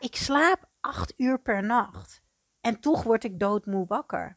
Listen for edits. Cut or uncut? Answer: uncut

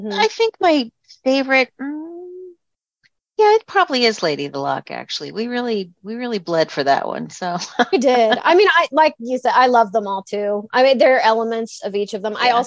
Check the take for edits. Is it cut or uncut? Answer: uncut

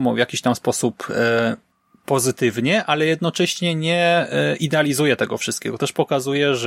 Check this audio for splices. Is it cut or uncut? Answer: cut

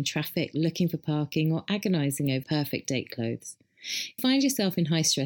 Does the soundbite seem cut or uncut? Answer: cut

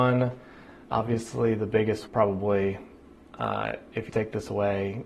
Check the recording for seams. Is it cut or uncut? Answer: cut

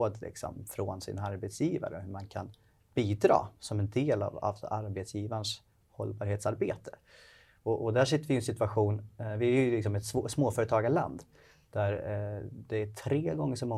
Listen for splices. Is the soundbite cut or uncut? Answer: uncut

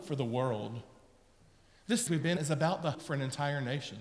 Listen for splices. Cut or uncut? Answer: cut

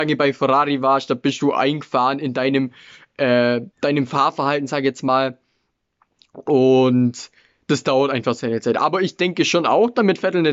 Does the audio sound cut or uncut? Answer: cut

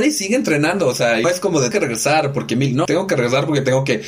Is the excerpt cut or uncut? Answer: cut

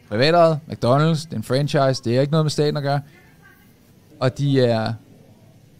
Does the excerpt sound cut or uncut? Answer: uncut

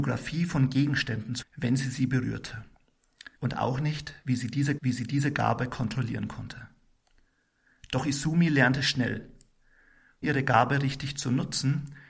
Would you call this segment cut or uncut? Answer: cut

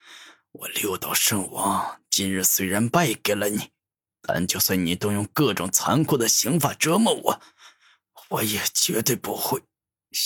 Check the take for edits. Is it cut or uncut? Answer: uncut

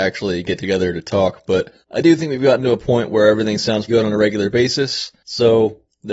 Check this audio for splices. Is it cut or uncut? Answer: cut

